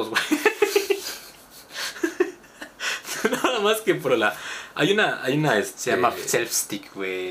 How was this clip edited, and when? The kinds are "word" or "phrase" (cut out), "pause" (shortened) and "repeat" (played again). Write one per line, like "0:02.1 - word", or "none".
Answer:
0:04.1 - word